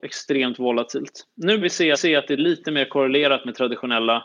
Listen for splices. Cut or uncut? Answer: cut